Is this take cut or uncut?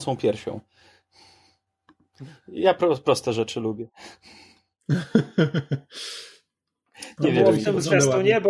uncut